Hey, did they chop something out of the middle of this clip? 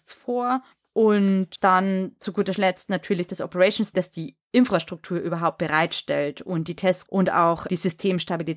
yes; 2 cuts; at 3.9 s, 7.1 s

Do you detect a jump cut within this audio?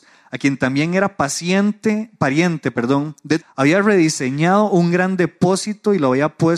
yes; 1 cut; at 3.4 s

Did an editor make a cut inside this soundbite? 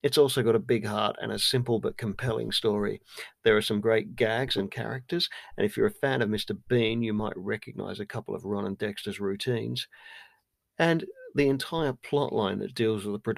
no; 0 cuts

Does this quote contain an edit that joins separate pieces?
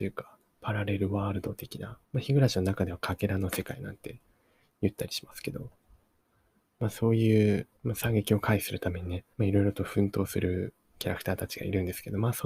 yes; 3 cuts; at 2.0 s, 7.8 s, 9.3 s

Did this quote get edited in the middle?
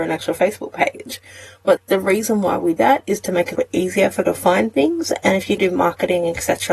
yes; 5 cuts; at 1.8 s, 2.8 s, 3.5 s, 4.2 s, 5.6 s

